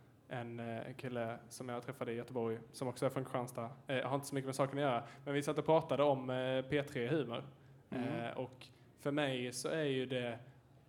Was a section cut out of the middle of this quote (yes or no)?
no